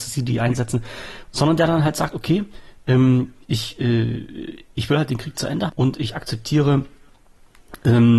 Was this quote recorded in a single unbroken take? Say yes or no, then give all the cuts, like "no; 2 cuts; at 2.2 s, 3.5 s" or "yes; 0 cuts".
no; 2 cuts; at 3.4 s, 5.7 s